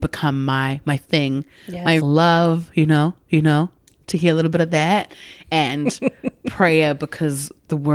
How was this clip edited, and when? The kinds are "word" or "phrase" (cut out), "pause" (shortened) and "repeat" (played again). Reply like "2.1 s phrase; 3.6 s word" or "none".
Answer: 2.0 s phrase; 3.3 s repeat